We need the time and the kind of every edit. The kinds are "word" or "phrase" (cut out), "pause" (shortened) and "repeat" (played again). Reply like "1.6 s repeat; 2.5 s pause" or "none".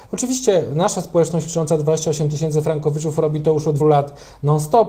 3.8 s word